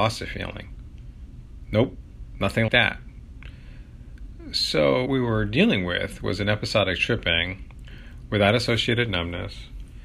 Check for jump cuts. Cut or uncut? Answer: cut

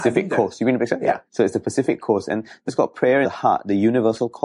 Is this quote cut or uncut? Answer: cut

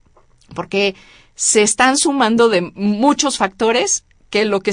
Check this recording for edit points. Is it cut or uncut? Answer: uncut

